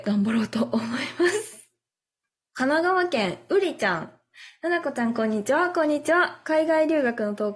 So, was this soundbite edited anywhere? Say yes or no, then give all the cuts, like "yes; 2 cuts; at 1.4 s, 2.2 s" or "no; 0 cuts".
yes; 1 cut; at 2.2 s